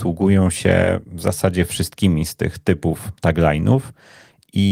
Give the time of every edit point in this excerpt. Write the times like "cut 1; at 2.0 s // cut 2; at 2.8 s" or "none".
cut 1; at 3.2 s